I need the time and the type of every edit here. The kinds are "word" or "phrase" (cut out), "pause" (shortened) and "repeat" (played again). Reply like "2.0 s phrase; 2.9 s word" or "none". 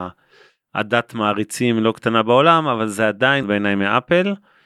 3.4 s phrase